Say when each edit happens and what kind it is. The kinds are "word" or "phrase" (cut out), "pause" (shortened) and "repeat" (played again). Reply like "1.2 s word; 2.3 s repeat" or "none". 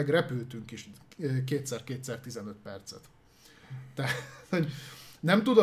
none

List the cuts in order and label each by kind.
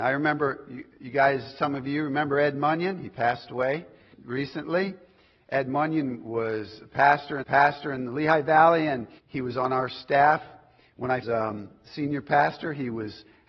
4.1 s word; 7.4 s repeat; 9.2 s pause; 11.2 s phrase

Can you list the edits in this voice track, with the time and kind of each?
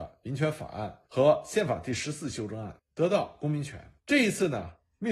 1.1 s pause; 4.0 s pause

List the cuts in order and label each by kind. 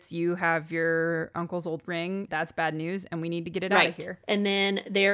2.3 s word

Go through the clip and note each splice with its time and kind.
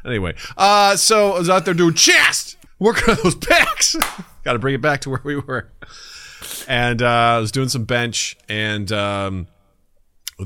2.7 s pause

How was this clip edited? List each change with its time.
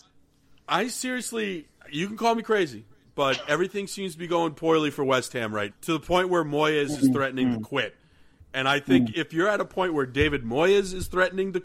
5.7 s word

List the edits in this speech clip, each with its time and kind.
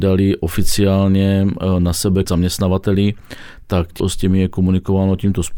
2.2 s word; 4.0 s word

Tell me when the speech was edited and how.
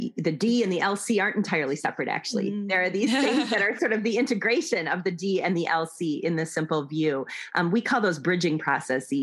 none

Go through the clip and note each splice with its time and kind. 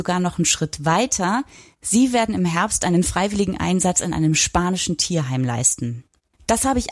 none

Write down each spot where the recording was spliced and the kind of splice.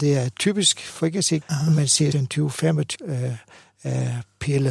1.4 s word; 2.1 s word; 2.9 s word

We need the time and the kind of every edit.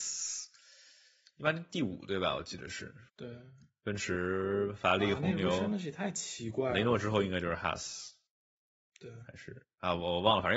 3.1 s pause

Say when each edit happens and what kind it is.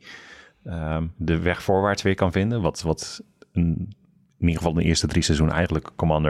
none

